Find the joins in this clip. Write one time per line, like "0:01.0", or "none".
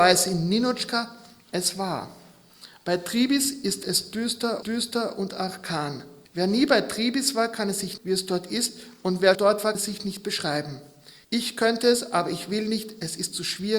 0:04.6
0:06.3
0:08.0
0:09.3
0:09.7
0:11.2